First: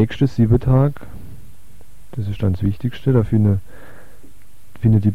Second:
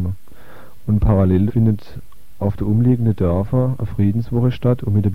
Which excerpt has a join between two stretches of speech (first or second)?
second